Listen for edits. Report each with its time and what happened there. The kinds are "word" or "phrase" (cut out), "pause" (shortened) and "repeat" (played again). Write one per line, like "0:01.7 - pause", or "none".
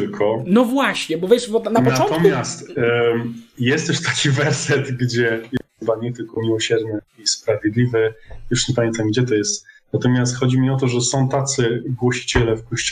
0:05.7 - pause
0:07.1 - pause